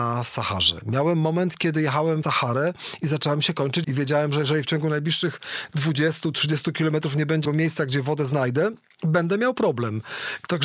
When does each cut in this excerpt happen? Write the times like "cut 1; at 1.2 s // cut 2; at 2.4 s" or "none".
cut 1; at 2.2 s // cut 2; at 3.8 s // cut 3; at 7.4 s